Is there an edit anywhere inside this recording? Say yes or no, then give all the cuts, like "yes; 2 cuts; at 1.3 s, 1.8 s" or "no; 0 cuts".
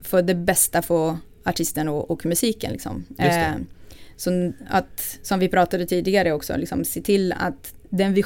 no; 0 cuts